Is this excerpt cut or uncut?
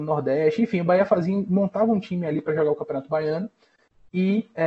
uncut